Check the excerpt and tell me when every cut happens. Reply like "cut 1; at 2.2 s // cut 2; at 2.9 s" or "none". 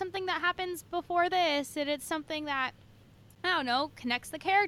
none